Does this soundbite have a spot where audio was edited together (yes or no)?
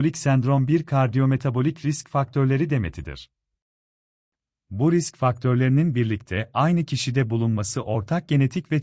no